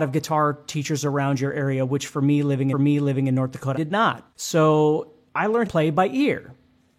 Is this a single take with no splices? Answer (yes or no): no